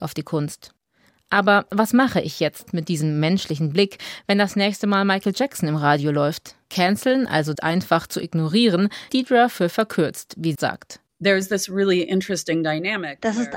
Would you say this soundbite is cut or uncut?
cut